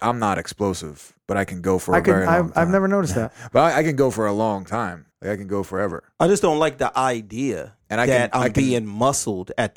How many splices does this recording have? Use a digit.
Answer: 1